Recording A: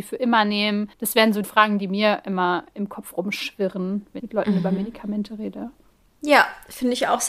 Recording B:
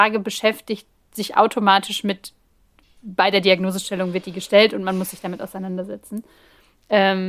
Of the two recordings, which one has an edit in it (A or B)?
A